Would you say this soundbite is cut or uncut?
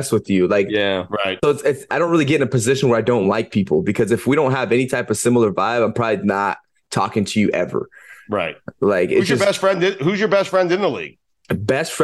uncut